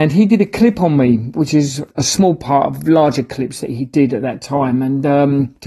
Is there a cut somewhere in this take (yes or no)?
no